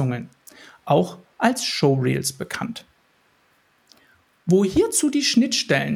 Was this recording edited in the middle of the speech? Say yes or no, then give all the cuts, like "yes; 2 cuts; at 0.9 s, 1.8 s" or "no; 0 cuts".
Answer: no; 0 cuts